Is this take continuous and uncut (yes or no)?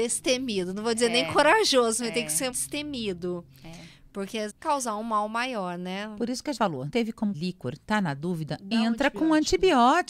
no